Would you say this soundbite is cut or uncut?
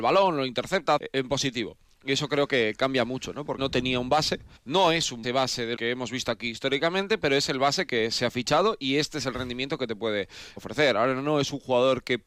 cut